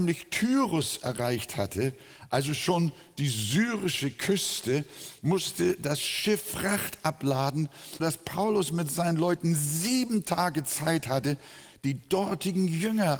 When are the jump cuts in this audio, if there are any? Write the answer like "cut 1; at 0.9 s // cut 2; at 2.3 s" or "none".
cut 1; at 8.0 s